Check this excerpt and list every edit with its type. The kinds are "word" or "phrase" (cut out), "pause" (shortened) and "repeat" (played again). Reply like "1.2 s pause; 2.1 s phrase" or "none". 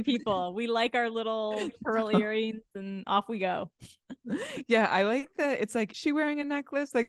5.9 s word